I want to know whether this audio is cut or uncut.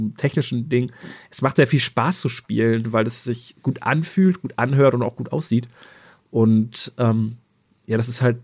uncut